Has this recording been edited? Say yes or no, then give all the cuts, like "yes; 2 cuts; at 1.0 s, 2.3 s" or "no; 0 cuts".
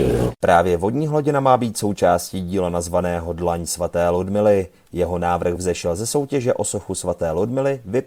no; 0 cuts